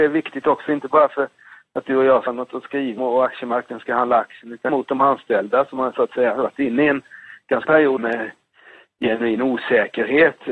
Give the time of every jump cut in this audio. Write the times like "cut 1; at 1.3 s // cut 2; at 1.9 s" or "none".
cut 1; at 2.3 s // cut 2; at 3.0 s // cut 3; at 4.7 s // cut 4; at 7.6 s // cut 5; at 8.0 s